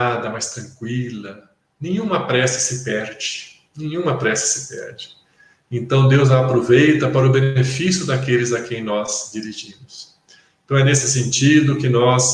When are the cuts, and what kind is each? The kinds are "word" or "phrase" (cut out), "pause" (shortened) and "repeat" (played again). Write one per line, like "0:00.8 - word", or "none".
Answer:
none